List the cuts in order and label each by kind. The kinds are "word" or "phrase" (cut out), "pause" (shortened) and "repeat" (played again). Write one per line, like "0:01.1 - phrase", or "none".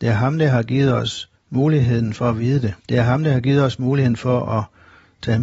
0:01.3 - pause
0:02.8 - pause